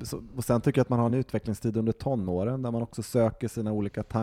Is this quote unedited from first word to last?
yes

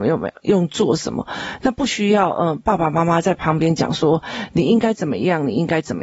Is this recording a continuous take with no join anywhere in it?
yes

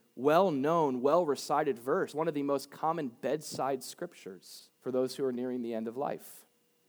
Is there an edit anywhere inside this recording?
yes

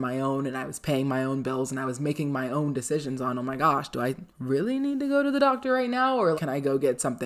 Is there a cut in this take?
yes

